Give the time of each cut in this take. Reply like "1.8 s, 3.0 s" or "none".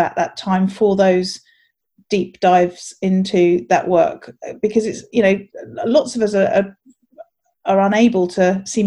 none